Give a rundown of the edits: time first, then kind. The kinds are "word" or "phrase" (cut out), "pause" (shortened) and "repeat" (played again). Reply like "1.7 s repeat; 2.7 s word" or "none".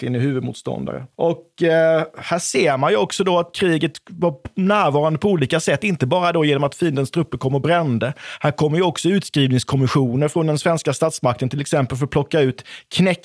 1.1 s pause